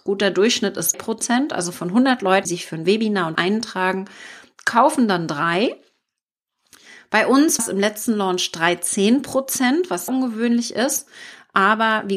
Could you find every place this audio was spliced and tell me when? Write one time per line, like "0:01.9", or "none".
0:00.9
0:02.4
0:03.3
0:07.6
0:10.1